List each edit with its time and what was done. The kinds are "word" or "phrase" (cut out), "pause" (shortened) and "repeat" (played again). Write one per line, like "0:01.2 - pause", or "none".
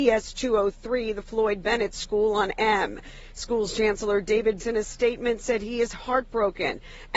0:02.5 - word
0:04.6 - word